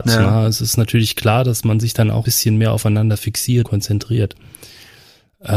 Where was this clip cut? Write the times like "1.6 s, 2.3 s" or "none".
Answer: 2.3 s, 3.7 s